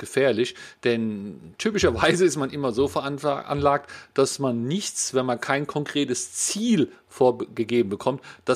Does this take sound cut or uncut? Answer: uncut